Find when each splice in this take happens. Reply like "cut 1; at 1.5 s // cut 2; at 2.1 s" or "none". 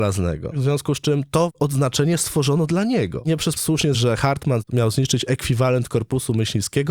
cut 1; at 3.6 s // cut 2; at 3.9 s